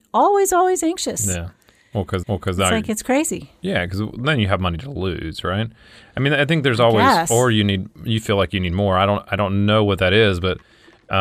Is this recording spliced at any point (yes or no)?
yes